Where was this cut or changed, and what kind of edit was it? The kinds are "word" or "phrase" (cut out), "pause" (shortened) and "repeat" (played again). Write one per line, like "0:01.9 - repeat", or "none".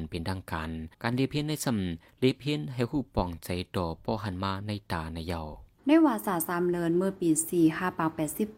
0:00.9 - pause
0:05.8 - pause